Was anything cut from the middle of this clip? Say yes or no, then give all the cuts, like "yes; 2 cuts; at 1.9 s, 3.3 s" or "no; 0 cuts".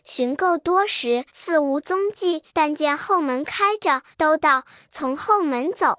yes; 3 cuts; at 1.3 s, 2.5 s, 4.1 s